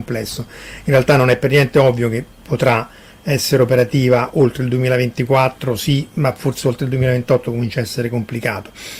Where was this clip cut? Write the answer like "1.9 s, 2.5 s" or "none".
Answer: none